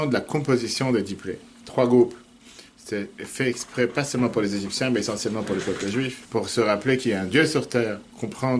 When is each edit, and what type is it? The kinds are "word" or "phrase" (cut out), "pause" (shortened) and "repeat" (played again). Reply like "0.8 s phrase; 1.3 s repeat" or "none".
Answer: 2.7 s pause; 6.2 s pause